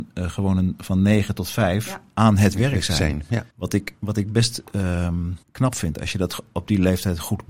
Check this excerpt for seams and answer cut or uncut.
cut